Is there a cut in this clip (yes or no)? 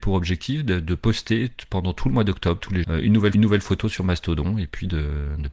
yes